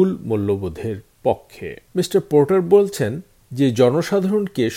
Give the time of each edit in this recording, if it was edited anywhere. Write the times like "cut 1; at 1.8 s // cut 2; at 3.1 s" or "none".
none